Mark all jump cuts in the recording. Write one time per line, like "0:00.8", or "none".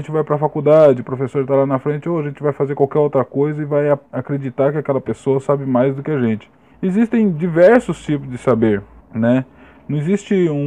0:04.1
0:06.7
0:09.0